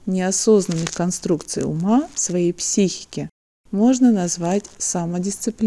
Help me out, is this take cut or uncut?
uncut